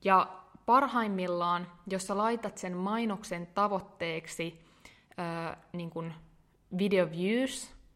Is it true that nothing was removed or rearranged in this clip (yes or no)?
yes